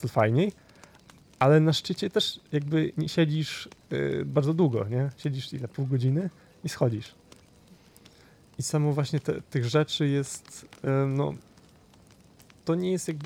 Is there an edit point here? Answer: no; 0 cuts

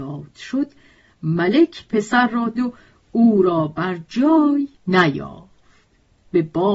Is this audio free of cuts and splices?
no; 2 cuts; at 2.6 s, 4.7 s

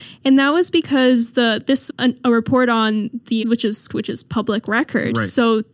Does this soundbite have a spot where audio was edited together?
yes; 3 cuts; at 1.9 s, 3.4 s, 3.9 s

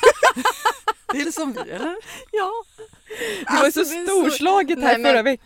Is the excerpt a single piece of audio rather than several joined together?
no; 2 cuts; at 1.2 s, 1.5 s

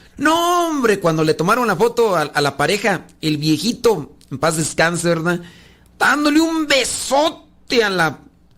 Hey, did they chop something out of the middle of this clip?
no; 0 cuts

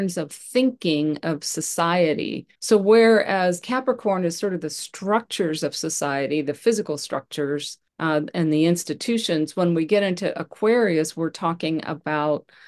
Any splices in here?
yes; 2 cuts; at 2.5 s, 7.9 s

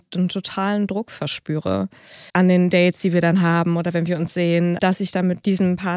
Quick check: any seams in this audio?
yes; 2 cuts; at 2.3 s, 4.8 s

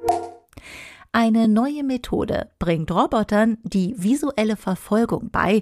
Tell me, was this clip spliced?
no; 0 cuts

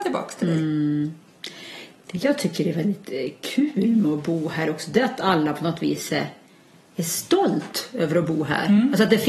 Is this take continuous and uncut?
yes; 0 cuts

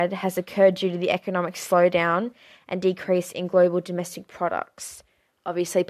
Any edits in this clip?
no; 0 cuts

